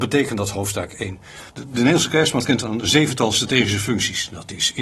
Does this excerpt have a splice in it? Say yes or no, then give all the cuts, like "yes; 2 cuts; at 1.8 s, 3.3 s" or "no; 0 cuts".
yes; 1 cut; at 1.5 s